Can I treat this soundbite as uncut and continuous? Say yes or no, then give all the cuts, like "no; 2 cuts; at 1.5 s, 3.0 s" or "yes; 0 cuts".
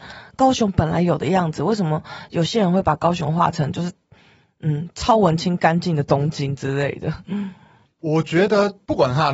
no; 1 cut; at 7.8 s